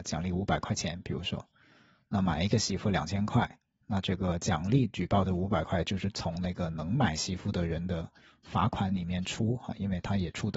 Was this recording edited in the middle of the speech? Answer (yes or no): no